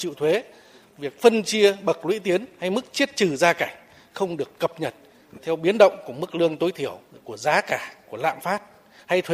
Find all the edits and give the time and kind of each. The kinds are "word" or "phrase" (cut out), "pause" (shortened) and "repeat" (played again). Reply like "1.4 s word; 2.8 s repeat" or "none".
none